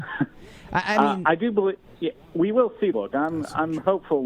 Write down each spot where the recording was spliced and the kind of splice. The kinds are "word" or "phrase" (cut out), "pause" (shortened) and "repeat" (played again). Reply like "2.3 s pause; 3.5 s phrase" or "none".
2.9 s word